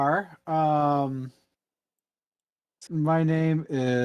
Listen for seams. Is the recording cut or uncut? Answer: cut